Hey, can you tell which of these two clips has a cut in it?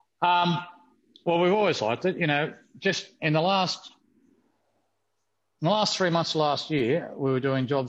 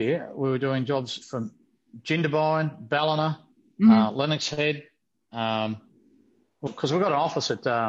second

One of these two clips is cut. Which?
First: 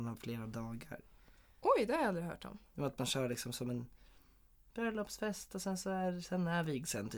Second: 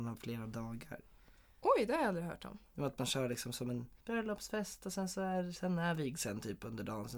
second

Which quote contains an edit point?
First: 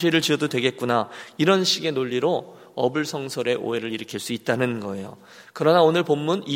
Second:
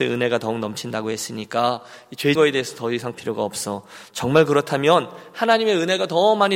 second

